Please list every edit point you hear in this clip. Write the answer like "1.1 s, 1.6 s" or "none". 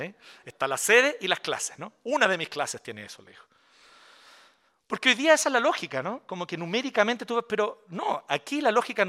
none